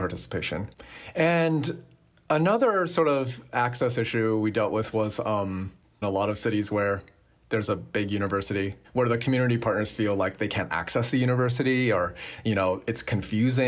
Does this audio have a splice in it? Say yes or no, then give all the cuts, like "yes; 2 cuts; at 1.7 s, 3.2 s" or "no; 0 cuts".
yes; 1 cut; at 6.0 s